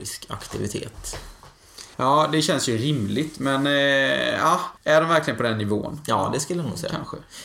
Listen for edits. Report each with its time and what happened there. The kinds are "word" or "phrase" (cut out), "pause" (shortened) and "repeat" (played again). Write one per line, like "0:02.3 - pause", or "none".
0:01.9 - pause
0:04.8 - pause